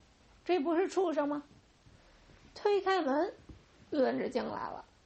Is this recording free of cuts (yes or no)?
yes